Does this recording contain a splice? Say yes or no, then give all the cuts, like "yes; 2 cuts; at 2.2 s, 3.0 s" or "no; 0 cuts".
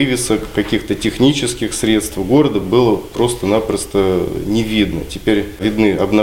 no; 0 cuts